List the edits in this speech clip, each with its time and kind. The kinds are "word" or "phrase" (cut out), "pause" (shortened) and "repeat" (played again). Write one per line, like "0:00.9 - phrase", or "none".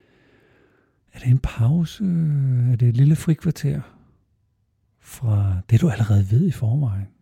none